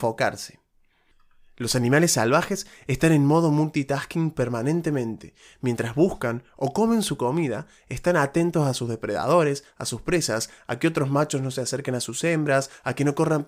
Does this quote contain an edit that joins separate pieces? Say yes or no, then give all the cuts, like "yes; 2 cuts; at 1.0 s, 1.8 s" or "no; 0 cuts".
no; 0 cuts